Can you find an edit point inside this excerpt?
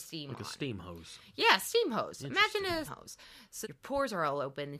yes; 2 cuts; at 2.9 s, 3.6 s

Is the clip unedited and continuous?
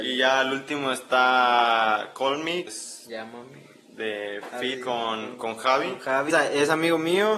no; 3 cuts; at 2.7 s, 4.7 s, 6.3 s

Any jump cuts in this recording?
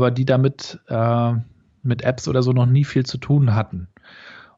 no; 0 cuts

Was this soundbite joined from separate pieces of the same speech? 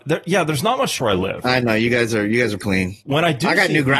yes; 2 cuts; at 1.0 s, 2.6 s

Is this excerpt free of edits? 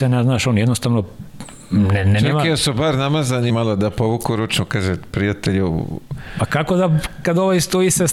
no; 1 cut; at 3.5 s

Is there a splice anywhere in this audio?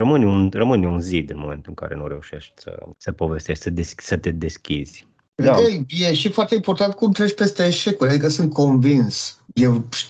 no; 0 cuts

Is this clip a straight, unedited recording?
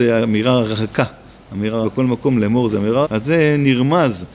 no; 2 cuts; at 1.8 s, 3.0 s

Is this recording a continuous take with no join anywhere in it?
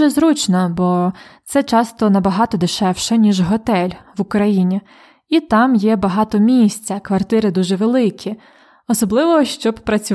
yes; 0 cuts

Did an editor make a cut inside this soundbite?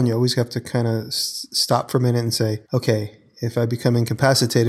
yes; 1 cut; at 2.6 s

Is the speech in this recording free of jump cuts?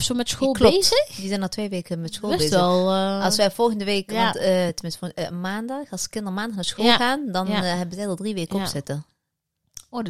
yes; 0 cuts

